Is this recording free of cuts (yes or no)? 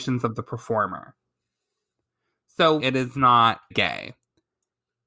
no